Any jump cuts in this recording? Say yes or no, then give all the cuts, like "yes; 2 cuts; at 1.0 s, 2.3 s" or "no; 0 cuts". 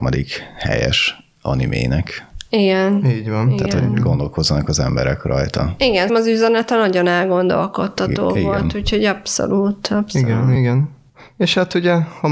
yes; 2 cuts; at 6.1 s, 10.6 s